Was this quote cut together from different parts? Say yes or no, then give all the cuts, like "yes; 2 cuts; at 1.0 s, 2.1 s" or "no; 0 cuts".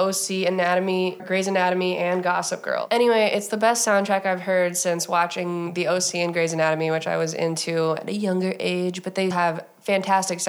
yes; 2 cuts; at 1.2 s, 9.3 s